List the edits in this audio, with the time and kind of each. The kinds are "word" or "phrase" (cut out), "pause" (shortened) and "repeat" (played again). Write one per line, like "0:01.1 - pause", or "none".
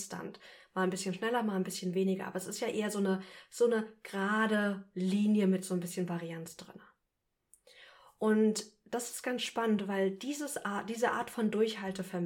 none